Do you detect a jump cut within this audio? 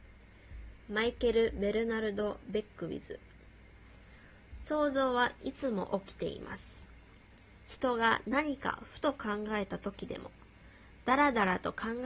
no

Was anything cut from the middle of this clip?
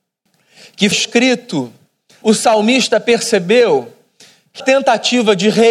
yes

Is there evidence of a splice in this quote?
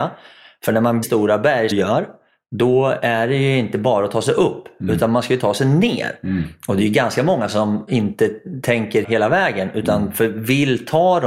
yes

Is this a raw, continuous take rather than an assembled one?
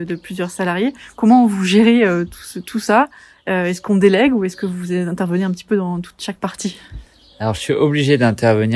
yes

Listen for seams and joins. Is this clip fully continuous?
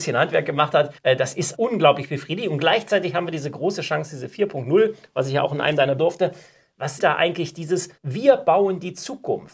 no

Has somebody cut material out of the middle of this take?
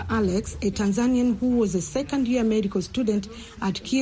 no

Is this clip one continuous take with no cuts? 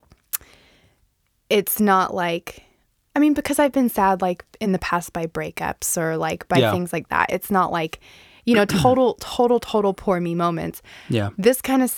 yes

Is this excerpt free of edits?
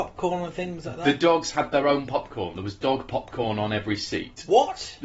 yes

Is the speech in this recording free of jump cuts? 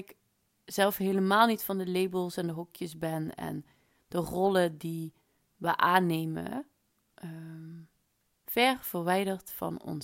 yes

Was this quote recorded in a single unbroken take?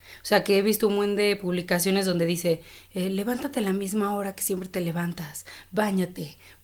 yes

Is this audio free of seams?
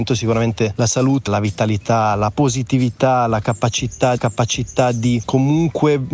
no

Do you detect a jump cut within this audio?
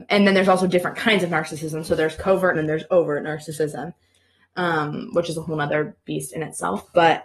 yes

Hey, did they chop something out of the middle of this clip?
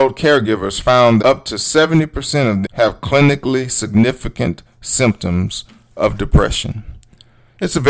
yes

